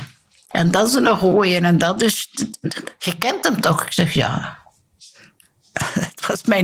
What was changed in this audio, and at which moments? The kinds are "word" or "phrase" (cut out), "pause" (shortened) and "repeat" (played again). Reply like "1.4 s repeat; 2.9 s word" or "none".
none